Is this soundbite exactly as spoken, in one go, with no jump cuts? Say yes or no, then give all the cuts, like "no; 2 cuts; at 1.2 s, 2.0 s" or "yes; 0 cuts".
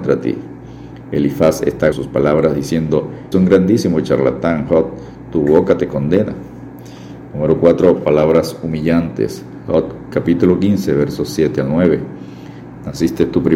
no; 2 cuts; at 1.9 s, 3.3 s